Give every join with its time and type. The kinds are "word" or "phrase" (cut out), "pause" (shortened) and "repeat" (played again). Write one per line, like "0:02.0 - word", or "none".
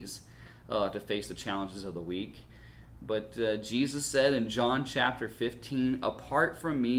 none